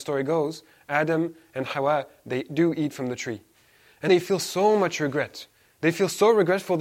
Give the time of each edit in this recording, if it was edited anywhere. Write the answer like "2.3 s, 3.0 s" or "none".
4.1 s